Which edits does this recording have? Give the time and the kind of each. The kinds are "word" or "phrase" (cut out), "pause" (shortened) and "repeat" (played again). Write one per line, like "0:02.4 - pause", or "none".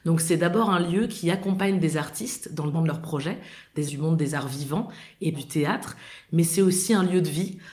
0:02.7 - word
0:03.9 - word
0:05.3 - word